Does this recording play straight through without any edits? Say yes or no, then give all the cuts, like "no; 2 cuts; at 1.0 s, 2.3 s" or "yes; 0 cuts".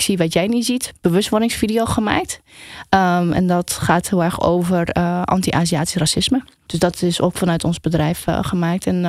yes; 0 cuts